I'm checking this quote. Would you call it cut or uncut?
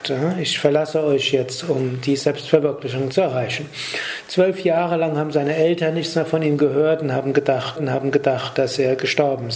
cut